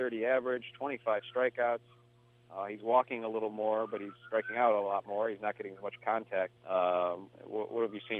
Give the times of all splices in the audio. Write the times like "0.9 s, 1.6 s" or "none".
6.6 s